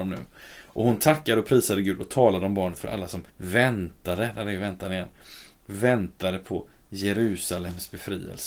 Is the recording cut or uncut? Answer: cut